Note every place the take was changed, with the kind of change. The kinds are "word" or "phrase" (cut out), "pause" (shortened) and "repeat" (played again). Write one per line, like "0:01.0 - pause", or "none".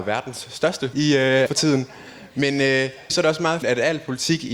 0:00.9 - word
0:01.5 - word
0:03.1 - word
0:03.6 - word

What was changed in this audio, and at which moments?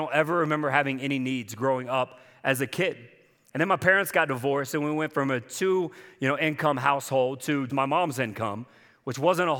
0:07.7 - word

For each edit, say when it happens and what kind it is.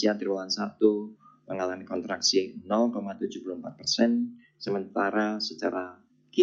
none

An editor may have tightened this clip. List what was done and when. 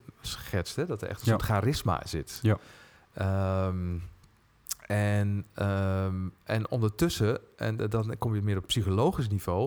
none

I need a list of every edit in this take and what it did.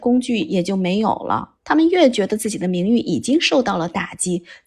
0:01.6 - pause

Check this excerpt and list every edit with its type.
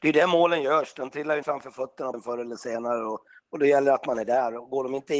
0:01.4 - word
0:02.1 - word

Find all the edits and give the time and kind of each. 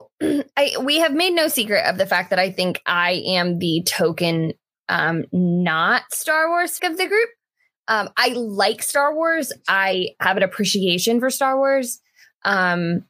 0:06.8 - word

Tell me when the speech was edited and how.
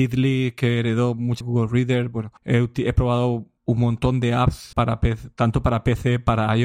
0:01.4 - phrase
0:02.4 - pause
0:03.6 - pause
0:04.7 - word
0:05.4 - word

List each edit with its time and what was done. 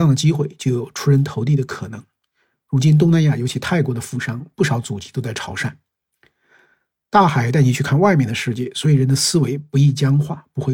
none

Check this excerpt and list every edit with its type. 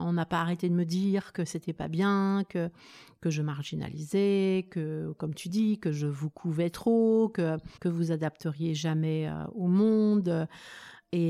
0:07.8 - pause

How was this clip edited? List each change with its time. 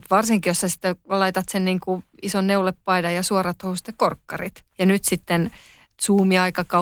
0:04.7 - pause

